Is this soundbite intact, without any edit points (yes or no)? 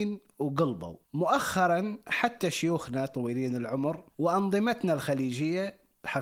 no